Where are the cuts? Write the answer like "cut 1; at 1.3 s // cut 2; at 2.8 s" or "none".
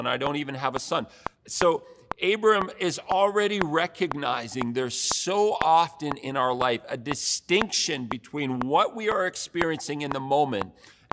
cut 1; at 1.3 s